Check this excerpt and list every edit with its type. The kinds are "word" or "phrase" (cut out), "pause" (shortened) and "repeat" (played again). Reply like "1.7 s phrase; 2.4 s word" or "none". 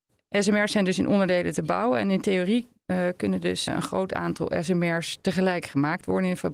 3.7 s word